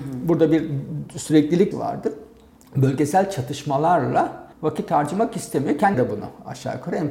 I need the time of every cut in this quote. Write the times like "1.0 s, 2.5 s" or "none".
1.7 s, 4.5 s, 5.9 s